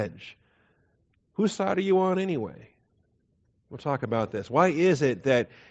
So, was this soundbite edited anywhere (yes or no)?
no